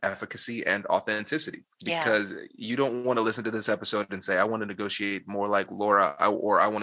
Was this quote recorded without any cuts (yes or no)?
no